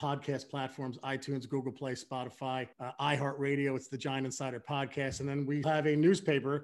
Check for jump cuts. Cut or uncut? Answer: cut